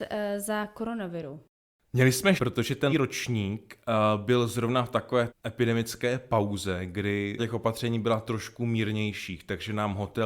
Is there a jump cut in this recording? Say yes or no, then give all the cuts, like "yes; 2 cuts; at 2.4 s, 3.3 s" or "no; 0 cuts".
yes; 4 cuts; at 2.4 s, 2.9 s, 5.3 s, 7.4 s